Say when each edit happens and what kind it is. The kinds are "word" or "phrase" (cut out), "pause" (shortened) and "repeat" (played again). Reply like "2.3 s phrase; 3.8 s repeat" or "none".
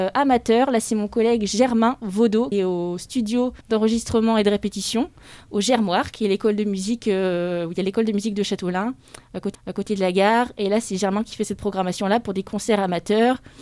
2.5 s word; 3.6 s pause; 9.5 s repeat